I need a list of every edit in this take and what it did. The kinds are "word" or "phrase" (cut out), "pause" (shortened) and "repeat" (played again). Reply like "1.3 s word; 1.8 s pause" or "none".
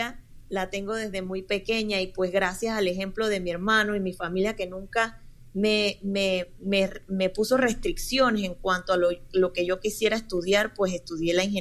none